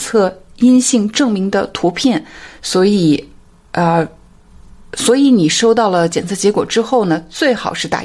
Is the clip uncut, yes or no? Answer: yes